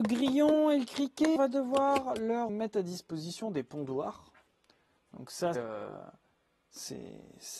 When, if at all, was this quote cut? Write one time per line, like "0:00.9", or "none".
0:01.4
0:02.5
0:05.5